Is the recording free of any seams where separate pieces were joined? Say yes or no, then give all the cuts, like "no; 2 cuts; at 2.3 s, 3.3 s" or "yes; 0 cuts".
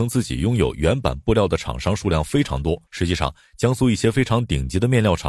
no; 1 cut; at 2.9 s